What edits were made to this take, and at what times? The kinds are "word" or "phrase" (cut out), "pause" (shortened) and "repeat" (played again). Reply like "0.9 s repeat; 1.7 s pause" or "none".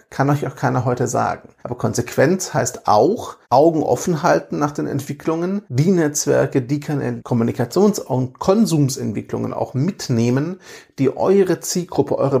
1.6 s pause; 3.4 s pause; 5.6 s pause; 7.2 s word